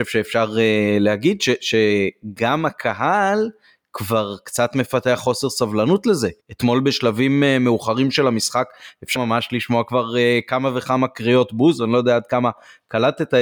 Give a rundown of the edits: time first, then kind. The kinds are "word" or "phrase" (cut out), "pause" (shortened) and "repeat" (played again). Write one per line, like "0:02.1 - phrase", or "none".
0:06.4 - pause
0:09.2 - word